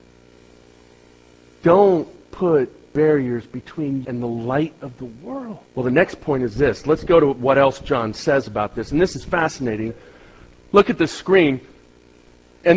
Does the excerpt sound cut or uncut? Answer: cut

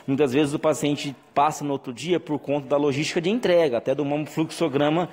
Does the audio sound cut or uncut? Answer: uncut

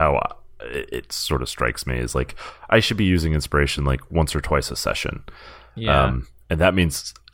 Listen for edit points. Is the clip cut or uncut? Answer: uncut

